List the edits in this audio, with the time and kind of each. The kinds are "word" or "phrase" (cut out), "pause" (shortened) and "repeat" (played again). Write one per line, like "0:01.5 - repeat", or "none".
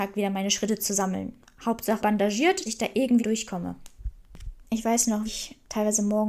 0:02.0 - word
0:02.7 - word
0:03.2 - word
0:05.3 - word